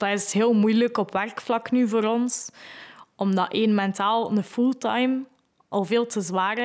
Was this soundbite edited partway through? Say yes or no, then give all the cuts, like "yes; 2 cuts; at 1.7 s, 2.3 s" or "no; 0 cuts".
no; 0 cuts